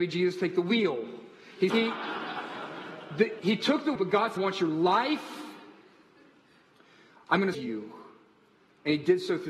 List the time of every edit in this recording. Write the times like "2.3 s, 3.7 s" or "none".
1.7 s, 3.4 s, 4.0 s, 4.4 s, 7.5 s